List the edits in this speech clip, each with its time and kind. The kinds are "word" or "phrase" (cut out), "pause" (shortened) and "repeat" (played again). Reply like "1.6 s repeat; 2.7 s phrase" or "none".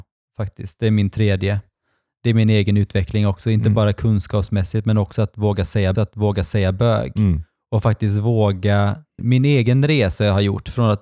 5.9 s repeat; 9.2 s word